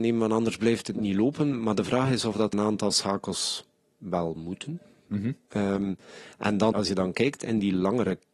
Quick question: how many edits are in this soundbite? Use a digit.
3